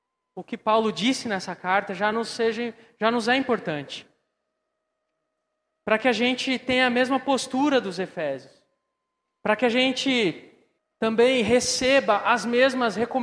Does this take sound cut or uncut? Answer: uncut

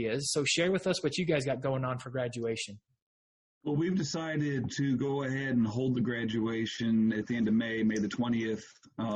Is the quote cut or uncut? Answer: uncut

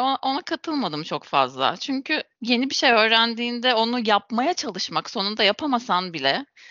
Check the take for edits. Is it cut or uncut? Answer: uncut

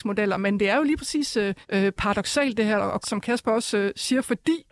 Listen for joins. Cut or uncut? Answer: cut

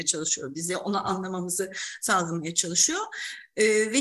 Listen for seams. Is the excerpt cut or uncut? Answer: uncut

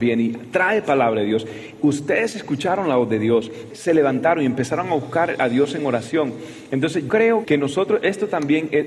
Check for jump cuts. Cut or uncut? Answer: cut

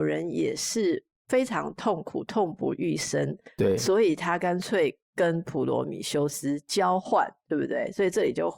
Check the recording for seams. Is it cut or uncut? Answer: cut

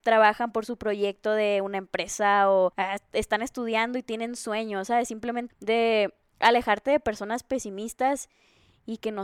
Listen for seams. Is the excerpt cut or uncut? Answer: cut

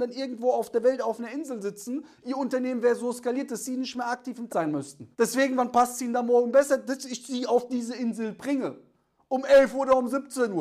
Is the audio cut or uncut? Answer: cut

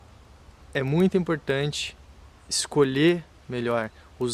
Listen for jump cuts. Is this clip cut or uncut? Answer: uncut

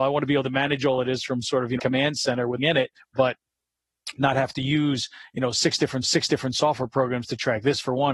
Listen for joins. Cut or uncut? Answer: cut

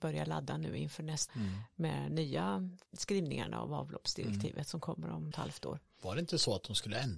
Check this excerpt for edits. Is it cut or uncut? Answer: cut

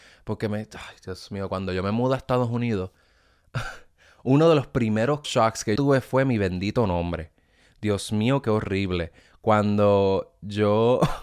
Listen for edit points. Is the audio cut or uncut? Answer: cut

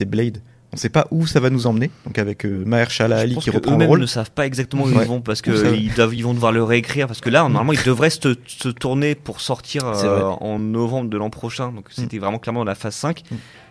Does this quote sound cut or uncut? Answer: uncut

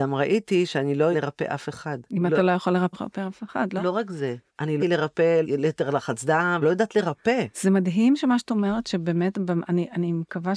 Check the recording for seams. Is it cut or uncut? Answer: cut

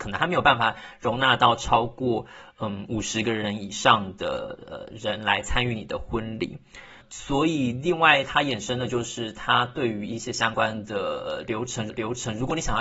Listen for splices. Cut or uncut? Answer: cut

